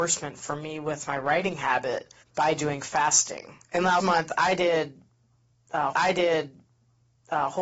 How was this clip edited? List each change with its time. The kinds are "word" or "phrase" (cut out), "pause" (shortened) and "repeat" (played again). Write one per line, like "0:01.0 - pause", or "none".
0:02.2 - pause
0:03.6 - pause
0:04.0 - word
0:05.9 - repeat